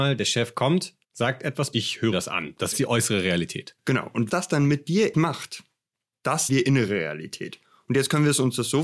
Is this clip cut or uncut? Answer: cut